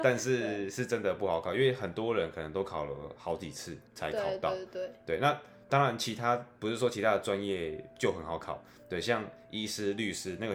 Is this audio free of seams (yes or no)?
no